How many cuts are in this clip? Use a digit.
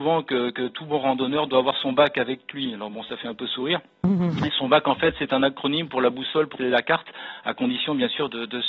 1